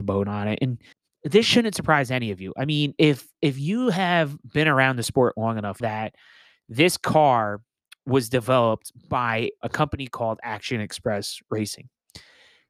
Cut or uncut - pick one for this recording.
cut